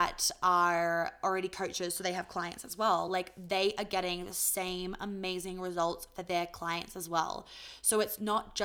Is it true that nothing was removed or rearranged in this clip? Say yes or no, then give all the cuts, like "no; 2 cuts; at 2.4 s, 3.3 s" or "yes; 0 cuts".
yes; 0 cuts